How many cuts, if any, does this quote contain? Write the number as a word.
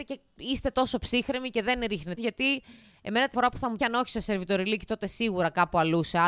three